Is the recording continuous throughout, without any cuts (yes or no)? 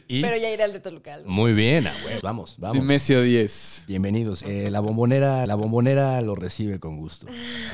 no